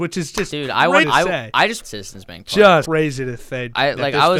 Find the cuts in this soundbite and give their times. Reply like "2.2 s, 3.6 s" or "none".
1.0 s, 1.8 s, 2.8 s